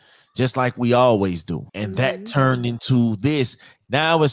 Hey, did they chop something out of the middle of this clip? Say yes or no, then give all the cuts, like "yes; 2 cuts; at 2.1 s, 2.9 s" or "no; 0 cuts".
yes; 1 cut; at 1.7 s